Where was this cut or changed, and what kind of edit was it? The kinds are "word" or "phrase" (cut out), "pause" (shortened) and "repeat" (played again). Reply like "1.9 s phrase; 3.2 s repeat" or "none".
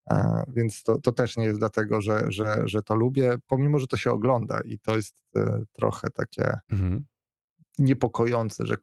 6.6 s pause